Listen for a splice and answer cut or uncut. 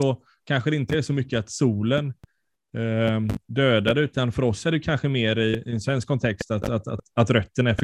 cut